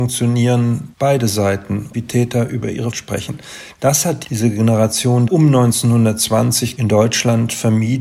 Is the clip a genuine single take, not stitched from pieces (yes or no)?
no